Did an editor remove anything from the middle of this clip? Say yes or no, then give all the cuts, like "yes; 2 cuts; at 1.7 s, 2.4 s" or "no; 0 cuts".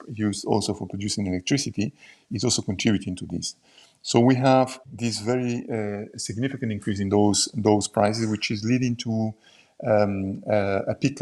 yes; 1 cut; at 4.8 s